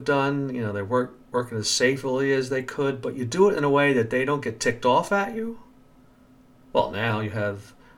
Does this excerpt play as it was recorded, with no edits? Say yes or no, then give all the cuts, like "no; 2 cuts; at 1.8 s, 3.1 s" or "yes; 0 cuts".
yes; 0 cuts